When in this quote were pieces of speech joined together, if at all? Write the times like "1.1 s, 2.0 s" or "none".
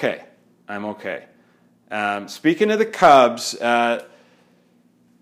none